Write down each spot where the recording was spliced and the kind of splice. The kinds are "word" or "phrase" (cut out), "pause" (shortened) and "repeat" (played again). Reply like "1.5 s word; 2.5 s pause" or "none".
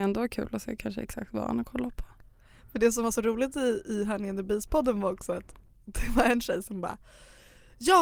none